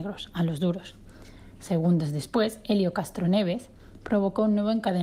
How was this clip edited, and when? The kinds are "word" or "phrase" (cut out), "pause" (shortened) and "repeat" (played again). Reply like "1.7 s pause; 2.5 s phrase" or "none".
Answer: none